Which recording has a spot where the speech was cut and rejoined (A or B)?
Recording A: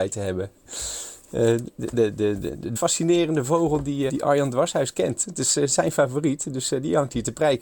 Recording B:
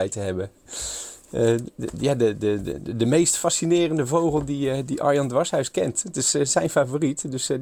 A